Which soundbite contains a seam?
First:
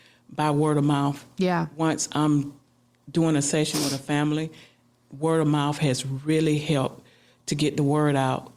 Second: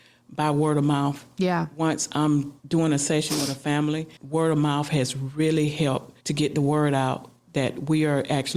second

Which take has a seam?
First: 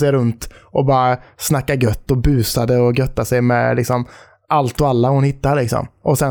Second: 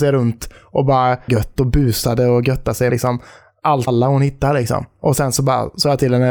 second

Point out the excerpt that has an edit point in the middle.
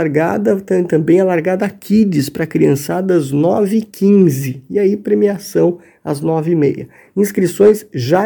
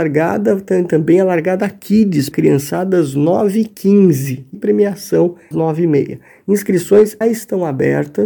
second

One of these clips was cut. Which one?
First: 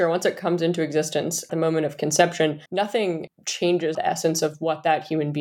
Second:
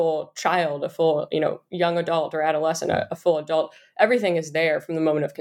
first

